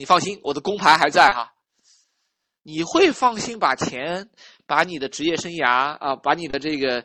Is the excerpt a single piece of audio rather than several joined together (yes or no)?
yes